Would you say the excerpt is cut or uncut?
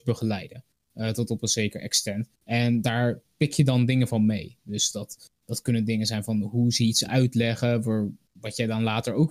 cut